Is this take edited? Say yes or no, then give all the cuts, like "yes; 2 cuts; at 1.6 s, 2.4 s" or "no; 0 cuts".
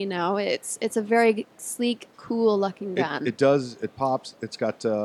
yes; 1 cut; at 2.1 s